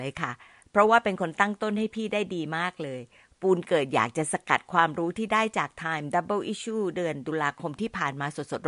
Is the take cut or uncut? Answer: uncut